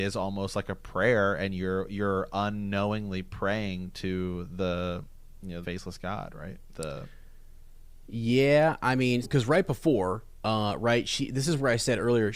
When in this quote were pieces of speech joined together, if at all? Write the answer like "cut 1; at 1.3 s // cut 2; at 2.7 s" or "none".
cut 1; at 5.6 s // cut 2; at 9.2 s